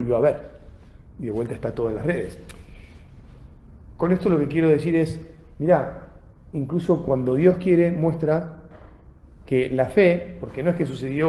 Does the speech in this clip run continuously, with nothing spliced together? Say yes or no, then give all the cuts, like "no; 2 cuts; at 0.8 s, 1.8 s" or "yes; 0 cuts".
yes; 0 cuts